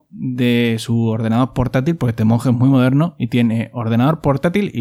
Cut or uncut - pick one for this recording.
uncut